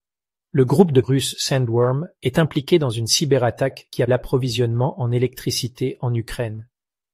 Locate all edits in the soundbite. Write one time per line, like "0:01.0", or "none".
0:01.0
0:04.1